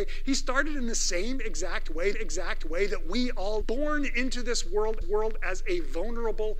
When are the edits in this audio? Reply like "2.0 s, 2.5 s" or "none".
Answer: 2.1 s, 3.6 s, 5.0 s